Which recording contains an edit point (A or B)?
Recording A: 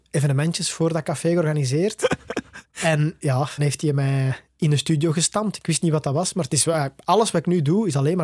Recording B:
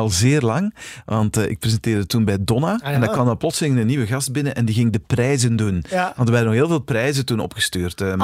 A